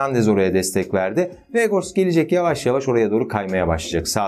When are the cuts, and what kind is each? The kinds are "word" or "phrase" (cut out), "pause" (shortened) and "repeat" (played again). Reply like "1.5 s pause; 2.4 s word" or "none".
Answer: none